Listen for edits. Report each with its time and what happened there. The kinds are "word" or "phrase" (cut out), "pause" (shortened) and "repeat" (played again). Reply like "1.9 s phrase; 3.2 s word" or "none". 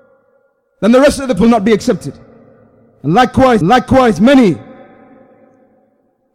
1.4 s word; 3.6 s repeat

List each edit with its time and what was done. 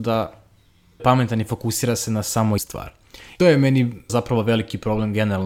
1.0 s word; 2.6 s word; 3.4 s word; 4.1 s word

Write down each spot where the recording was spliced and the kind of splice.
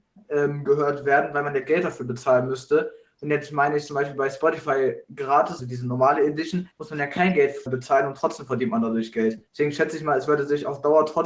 5.6 s word; 6.7 s pause; 7.7 s word; 9.5 s pause

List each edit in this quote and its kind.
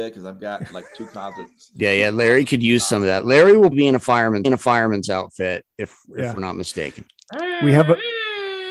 3.7 s word; 4.4 s repeat

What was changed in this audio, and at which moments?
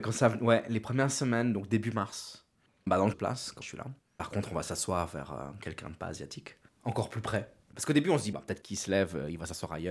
2.7 s pause; 3.1 s phrase; 3.6 s word; 4.0 s pause; 6.7 s pause; 7.6 s pause; 8.3 s word

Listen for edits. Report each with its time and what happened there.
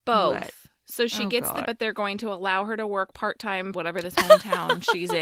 1.6 s word; 3.7 s word

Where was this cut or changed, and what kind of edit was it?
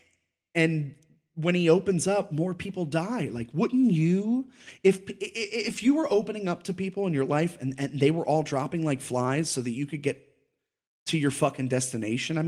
none

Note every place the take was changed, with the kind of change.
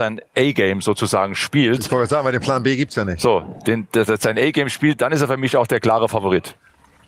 none

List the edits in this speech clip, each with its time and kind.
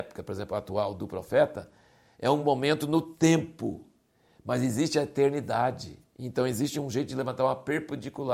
none

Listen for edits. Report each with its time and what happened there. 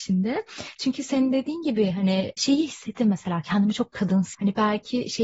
4.3 s word

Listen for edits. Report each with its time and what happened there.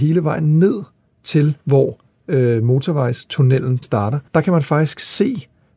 1.6 s pause; 3.8 s word; 4.3 s pause

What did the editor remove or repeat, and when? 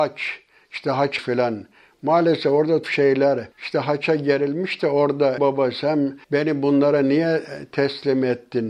1.2 s word; 2.8 s word; 3.5 s pause; 5.4 s word; 6.2 s pause

